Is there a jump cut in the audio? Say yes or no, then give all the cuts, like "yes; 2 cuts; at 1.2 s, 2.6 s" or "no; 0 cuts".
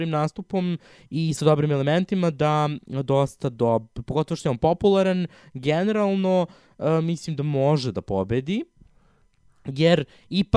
no; 0 cuts